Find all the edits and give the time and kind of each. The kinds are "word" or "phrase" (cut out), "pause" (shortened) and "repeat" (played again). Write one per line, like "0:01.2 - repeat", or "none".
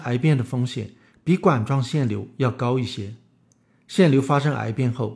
none